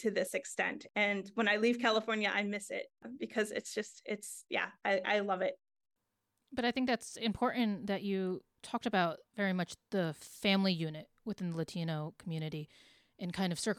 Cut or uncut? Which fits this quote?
cut